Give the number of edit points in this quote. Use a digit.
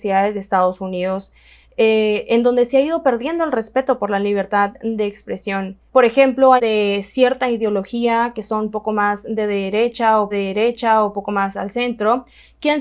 3